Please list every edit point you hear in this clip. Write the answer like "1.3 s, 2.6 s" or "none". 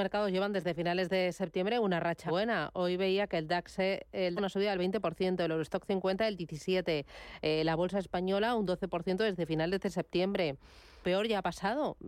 2.3 s, 4.4 s, 11.0 s